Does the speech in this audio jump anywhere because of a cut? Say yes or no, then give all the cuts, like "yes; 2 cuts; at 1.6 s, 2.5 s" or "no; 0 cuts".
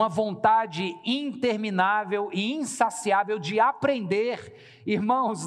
no; 0 cuts